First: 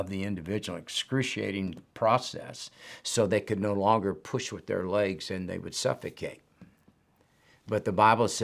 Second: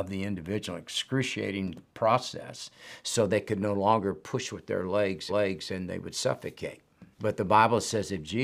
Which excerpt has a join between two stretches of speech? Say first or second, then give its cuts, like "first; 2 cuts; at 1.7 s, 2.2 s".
second; 2 cuts; at 5.3 s, 7.1 s